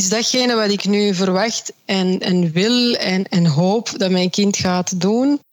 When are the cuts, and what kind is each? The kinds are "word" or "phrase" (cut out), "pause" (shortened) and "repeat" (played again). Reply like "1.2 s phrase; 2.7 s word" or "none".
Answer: none